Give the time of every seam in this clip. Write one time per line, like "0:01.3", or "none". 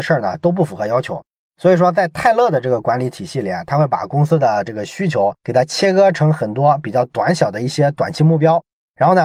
none